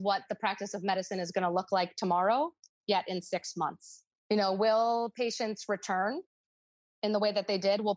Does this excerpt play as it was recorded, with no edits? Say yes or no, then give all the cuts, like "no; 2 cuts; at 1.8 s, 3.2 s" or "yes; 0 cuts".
yes; 0 cuts